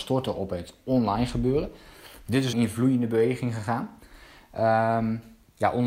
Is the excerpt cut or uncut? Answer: cut